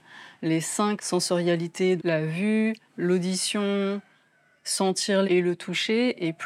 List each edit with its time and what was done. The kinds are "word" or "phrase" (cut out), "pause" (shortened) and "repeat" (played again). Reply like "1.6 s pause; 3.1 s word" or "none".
1.0 s word; 2.0 s word; 2.9 s pause; 5.2 s phrase